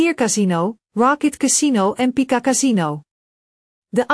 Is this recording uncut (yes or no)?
yes